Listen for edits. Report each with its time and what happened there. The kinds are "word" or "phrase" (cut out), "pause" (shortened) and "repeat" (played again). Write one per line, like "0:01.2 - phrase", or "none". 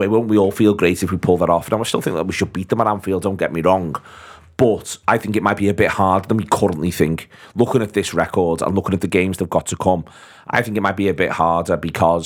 none

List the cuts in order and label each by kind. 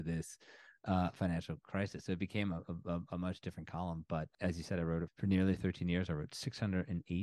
0:05.1 - word

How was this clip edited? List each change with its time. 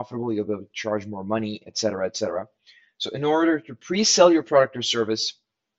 none

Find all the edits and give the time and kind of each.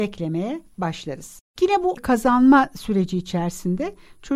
0:01.5 - pause
0:01.9 - word

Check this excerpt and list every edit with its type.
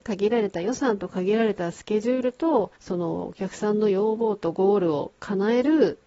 0:02.8 - pause

